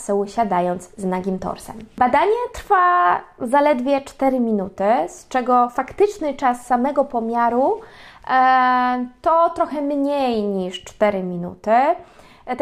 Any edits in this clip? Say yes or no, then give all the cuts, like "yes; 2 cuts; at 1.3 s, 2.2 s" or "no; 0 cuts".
no; 0 cuts